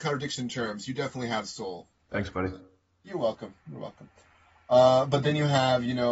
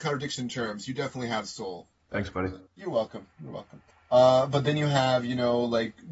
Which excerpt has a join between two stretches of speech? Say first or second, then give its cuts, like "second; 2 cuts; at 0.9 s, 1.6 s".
second; 2 cuts; at 2.7 s, 3.9 s